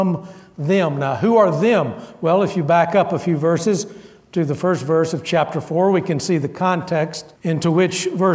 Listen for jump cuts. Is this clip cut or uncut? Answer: cut